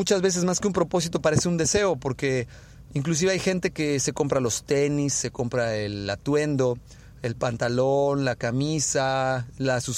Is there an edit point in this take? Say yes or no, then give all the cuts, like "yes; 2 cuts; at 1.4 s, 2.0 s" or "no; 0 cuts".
no; 0 cuts